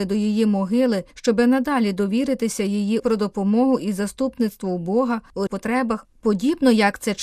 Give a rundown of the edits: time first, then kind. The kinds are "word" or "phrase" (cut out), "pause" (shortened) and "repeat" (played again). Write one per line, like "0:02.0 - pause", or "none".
0:03.0 - phrase
0:05.5 - phrase